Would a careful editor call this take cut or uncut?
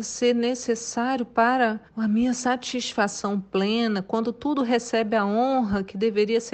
cut